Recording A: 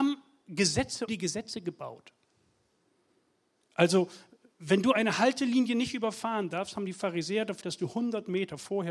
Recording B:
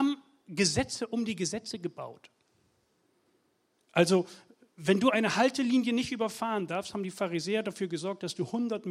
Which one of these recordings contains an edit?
A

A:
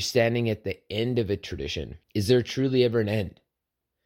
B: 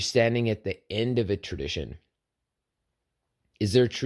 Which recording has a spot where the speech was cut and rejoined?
A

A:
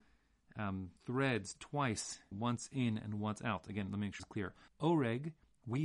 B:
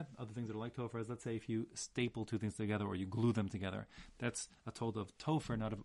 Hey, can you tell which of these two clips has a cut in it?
A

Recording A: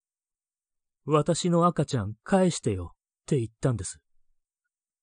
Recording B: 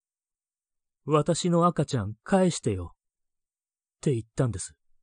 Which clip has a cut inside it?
A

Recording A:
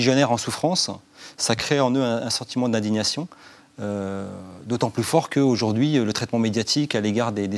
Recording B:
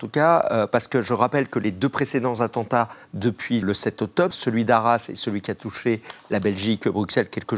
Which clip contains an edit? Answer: B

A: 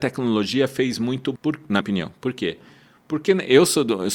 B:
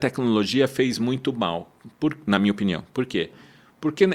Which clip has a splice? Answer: A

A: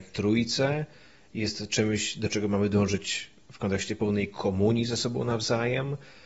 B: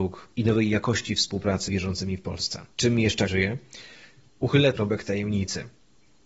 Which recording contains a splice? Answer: B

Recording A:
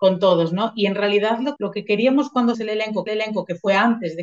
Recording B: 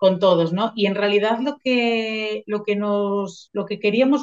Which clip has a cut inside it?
A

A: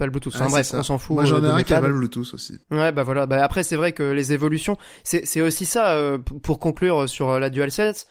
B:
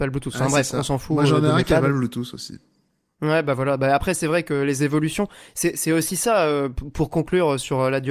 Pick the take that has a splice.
A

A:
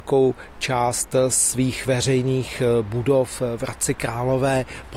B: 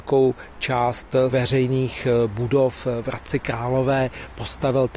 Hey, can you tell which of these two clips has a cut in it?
B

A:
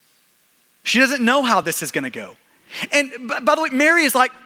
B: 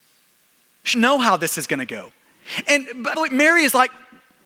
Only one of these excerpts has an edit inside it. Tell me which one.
B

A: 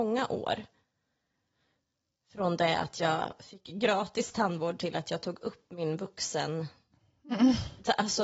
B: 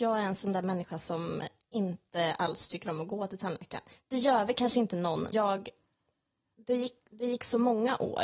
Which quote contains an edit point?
B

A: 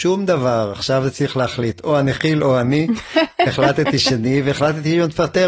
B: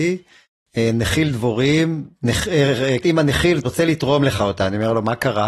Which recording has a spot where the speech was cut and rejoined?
B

